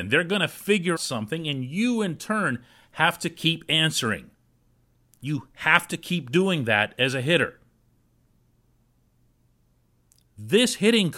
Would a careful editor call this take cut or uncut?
cut